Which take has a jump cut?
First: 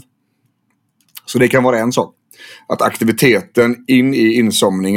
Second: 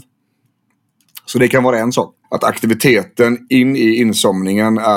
second; 1 cut; at 2.2 s

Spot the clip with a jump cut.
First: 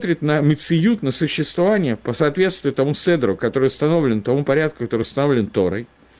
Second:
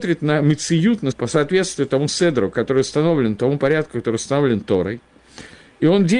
second; 1 cut; at 1.1 s

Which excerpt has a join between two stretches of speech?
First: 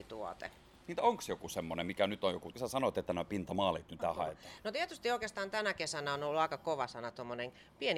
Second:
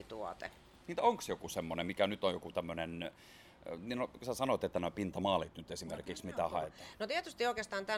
first; 2 cuts; at 2.5 s, 4.0 s

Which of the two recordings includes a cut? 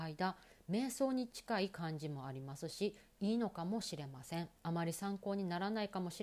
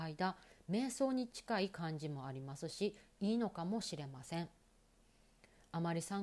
first; 1 cut; at 4.6 s

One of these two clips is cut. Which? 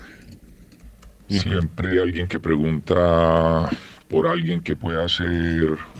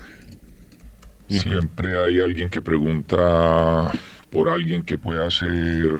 first; 1 cut; at 1.9 s

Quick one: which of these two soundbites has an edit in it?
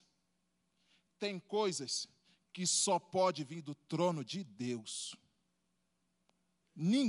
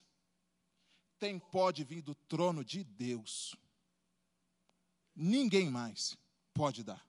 second; 1 cut; at 1.4 s

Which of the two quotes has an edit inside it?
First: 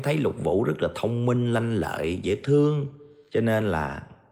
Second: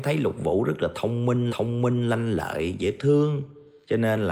second; 1 cut; at 1.5 s

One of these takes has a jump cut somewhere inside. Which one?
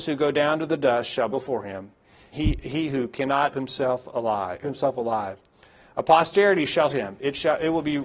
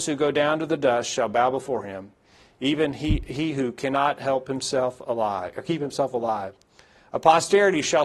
first; 5 cuts; at 1.3 s, 2.3 s, 3.5 s, 4.6 s, 6.9 s

